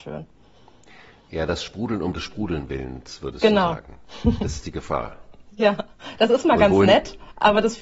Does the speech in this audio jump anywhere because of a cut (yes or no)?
no